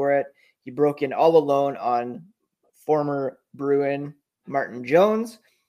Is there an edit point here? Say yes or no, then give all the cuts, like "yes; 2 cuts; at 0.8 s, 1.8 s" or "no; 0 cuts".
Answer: no; 0 cuts